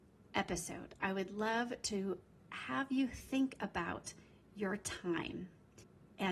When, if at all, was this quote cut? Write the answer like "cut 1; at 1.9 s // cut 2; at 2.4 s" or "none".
none